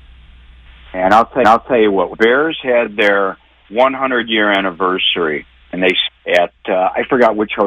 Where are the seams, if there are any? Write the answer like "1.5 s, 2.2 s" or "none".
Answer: 1.4 s, 2.1 s, 6.1 s